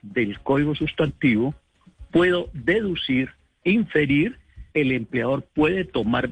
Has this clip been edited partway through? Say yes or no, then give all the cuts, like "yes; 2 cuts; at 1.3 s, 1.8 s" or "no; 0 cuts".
yes; 1 cut; at 4.7 s